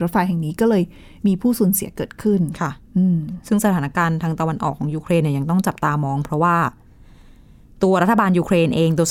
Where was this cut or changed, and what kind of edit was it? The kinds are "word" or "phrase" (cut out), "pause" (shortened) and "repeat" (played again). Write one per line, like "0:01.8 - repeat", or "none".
none